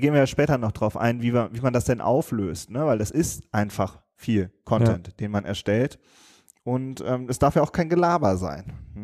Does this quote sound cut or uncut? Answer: uncut